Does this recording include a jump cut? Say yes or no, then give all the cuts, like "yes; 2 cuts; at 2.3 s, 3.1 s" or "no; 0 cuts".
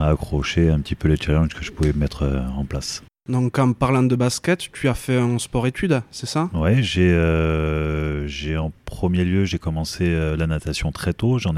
yes; 1 cut; at 3.1 s